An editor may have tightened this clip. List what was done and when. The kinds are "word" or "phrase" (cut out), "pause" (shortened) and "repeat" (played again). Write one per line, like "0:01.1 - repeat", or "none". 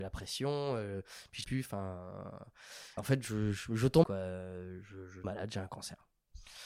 0:01.4 - word
0:03.0 - word
0:04.0 - word
0:05.2 - word